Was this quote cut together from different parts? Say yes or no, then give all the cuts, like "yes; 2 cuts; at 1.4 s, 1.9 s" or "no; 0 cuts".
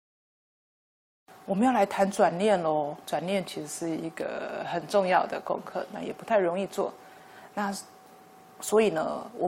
yes; 1 cut; at 3.0 s